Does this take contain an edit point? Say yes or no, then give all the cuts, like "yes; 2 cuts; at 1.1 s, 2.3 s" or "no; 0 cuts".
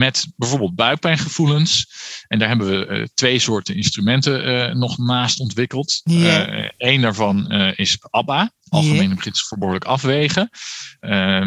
yes; 1 cut; at 8.6 s